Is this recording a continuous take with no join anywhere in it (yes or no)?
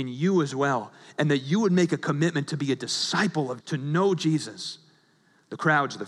no